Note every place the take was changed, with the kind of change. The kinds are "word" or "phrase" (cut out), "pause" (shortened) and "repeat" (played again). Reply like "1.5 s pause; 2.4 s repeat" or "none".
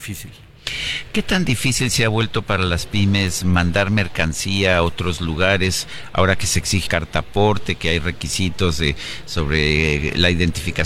6.9 s word